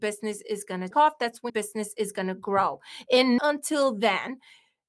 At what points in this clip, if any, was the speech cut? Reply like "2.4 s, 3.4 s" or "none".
0.9 s, 1.5 s, 3.4 s